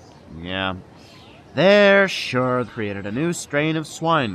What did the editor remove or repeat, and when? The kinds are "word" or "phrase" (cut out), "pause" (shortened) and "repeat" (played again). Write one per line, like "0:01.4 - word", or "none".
0:01.5 - pause
0:02.7 - word